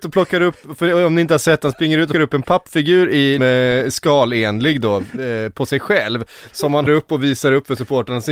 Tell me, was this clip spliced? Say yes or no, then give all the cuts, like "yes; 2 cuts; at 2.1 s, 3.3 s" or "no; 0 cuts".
yes; 4 cuts; at 2.1 s, 2.4 s, 3.4 s, 6.9 s